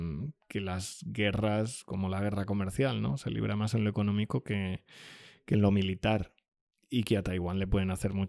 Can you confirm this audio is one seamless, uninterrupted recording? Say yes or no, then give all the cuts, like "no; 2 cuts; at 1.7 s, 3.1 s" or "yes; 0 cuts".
yes; 0 cuts